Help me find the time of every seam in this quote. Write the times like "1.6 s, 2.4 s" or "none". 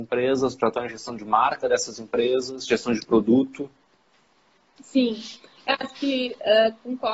none